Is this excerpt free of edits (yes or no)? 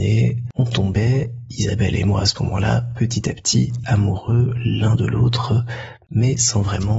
yes